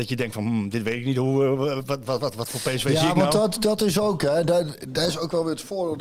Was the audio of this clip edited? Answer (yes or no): no